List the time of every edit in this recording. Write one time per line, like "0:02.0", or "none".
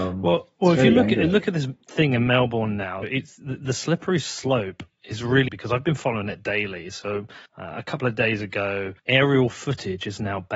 0:03.0
0:05.5
0:07.5
0:09.0

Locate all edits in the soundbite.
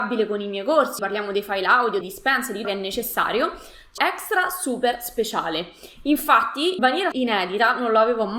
0:01.0
0:02.0
0:02.6
0:04.0
0:06.8
0:07.1

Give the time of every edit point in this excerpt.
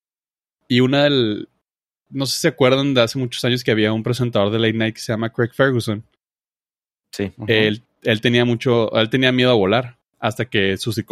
none

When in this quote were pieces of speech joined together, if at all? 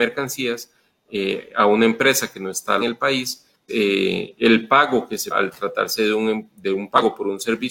0:02.8
0:03.7
0:05.3

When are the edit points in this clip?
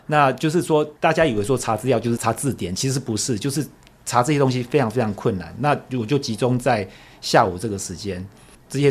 none

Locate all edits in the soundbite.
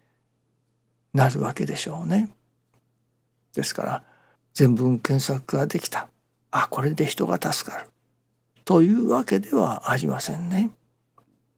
0:04.4

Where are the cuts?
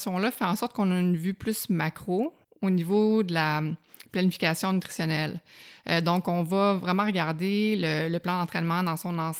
0:02.4

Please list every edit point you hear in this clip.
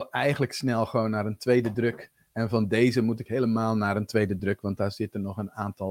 none

